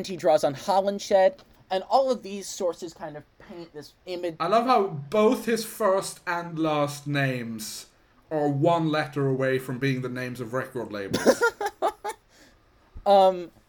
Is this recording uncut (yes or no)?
yes